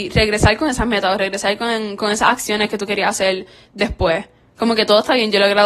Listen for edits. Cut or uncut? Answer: uncut